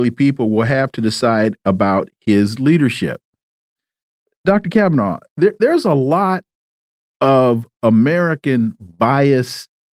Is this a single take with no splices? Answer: yes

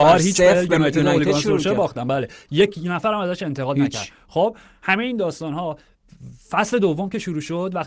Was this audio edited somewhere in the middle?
no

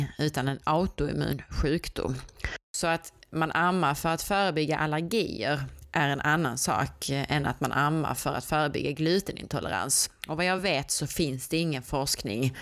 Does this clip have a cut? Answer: no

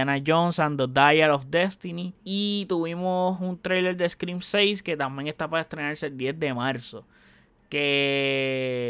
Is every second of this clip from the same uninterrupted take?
no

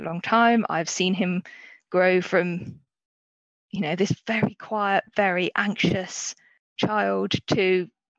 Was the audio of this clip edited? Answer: no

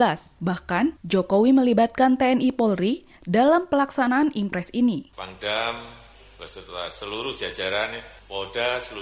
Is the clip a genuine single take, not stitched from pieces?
no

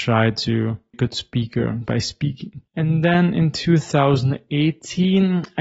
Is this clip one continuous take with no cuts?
no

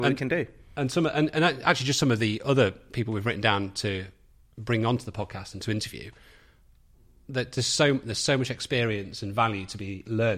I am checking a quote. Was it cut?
no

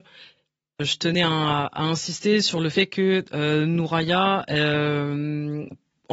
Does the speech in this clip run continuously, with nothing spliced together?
yes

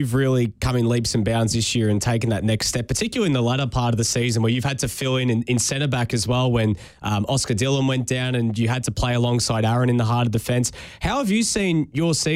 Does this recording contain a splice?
no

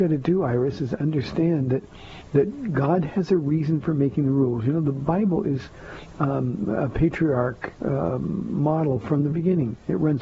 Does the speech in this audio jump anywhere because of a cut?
yes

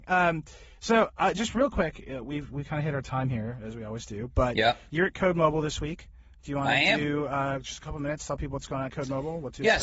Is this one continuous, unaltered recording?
yes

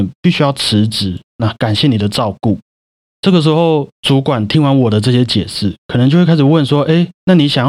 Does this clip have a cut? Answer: no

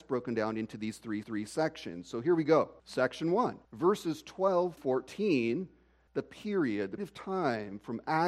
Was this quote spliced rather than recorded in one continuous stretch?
yes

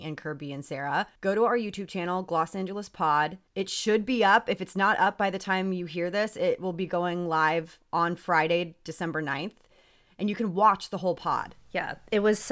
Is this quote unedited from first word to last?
no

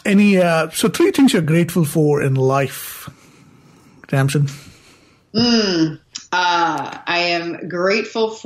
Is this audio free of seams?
yes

